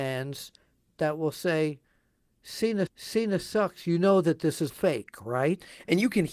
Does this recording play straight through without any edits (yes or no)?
no